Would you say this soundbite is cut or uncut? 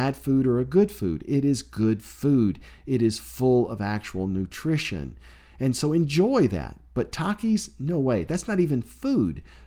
uncut